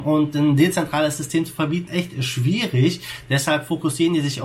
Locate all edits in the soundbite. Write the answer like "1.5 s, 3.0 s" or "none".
1.9 s